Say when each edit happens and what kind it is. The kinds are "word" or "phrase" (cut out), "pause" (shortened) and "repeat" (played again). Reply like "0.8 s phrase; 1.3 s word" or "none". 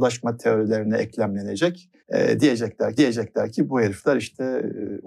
2.0 s pause; 3.0 s repeat

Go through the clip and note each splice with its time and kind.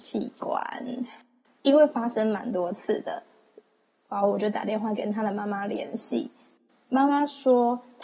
none

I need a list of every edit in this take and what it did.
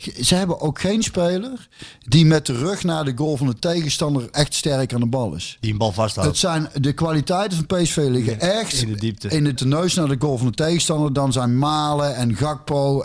4.3 s word; 9.6 s phrase

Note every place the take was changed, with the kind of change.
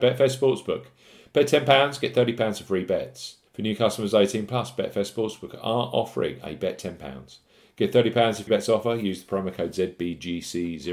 3.5 s pause; 8.5 s word

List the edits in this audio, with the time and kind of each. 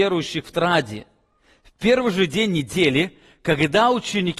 none

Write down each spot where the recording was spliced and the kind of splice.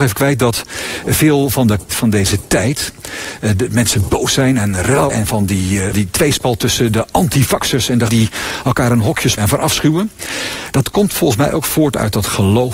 1.9 s word; 5.1 s word; 5.9 s word; 8.1 s word; 9.4 s word

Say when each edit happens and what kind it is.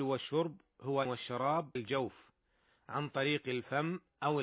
1.0 s phrase; 1.8 s word

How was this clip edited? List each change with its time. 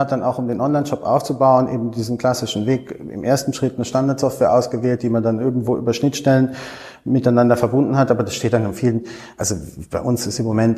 none

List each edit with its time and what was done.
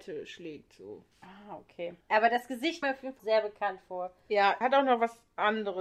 1.1 s pause; 2.0 s pause; 2.8 s word; 3.2 s word; 4.6 s word

